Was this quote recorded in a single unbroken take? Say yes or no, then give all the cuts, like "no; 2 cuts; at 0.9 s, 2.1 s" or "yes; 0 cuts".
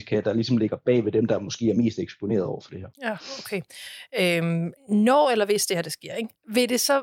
no; 2 cuts; at 2.9 s, 4.8 s